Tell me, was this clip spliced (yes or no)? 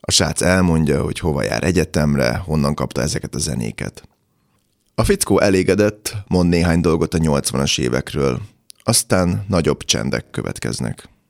no